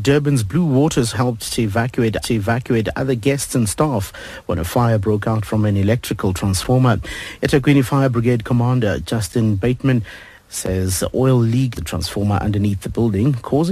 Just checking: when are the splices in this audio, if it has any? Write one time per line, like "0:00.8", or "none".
0:01.1
0:02.2
0:11.8